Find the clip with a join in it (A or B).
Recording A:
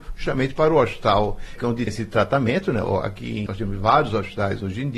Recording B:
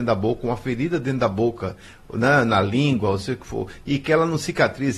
A